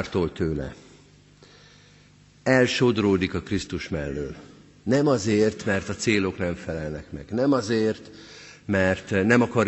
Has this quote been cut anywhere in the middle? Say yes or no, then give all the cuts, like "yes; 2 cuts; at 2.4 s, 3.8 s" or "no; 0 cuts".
no; 0 cuts